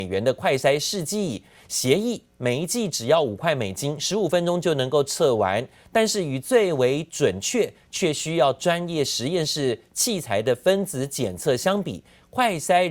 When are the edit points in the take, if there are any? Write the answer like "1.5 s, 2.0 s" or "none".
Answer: none